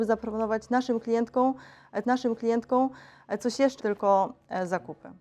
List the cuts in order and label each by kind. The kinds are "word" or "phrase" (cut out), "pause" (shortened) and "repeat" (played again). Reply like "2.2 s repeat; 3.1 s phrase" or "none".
2.0 s repeat; 3.8 s word